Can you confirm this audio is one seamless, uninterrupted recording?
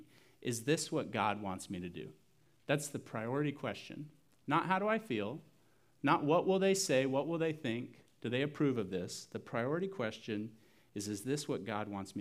yes; 0 cuts

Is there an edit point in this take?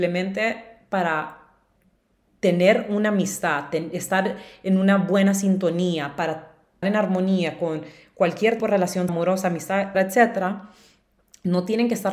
yes; 4 cuts; at 6.8 s, 8.6 s, 9.1 s, 9.9 s

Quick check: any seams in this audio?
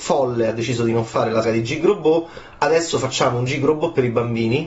yes; 1 cut; at 1.4 s

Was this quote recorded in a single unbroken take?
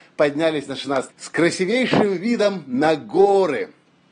no; 1 cut; at 1.1 s

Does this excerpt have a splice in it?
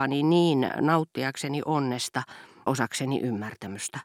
yes; 1 cut; at 2.7 s

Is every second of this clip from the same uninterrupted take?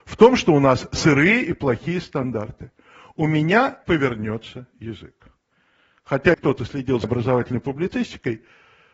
no; 3 cuts; at 3.8 s, 6.3 s, 7.0 s

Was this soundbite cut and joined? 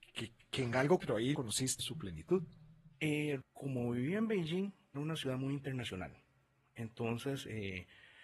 yes; 5 cuts; at 1.0 s, 1.3 s, 1.8 s, 3.4 s, 4.9 s

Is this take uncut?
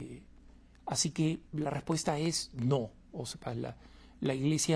no; 1 cut; at 1.4 s

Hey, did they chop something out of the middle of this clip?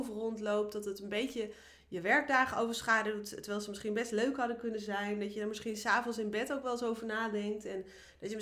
no; 0 cuts

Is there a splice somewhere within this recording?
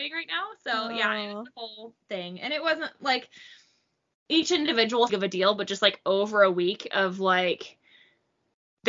yes; 2 cuts; at 2.0 s, 5.1 s

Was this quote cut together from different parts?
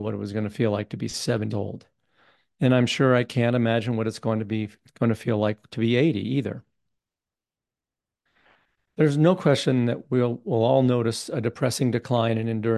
yes; 1 cut; at 1.5 s

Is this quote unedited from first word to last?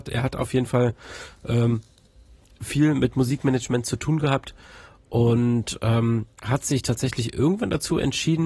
yes; 0 cuts

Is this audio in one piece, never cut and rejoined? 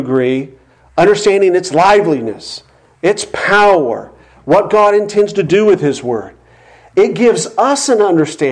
yes; 0 cuts

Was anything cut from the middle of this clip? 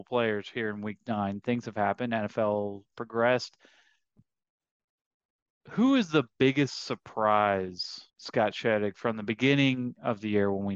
yes; 2 cuts; at 2.9 s, 8.1 s

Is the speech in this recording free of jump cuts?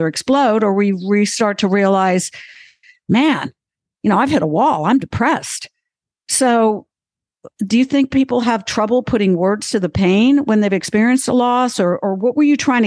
yes; 0 cuts

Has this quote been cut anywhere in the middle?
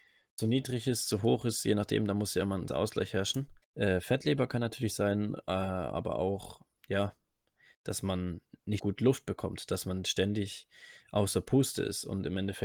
yes; 4 cuts; at 2.7 s, 3.6 s, 6.8 s, 8.8 s

